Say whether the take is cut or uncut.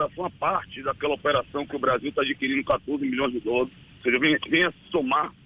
uncut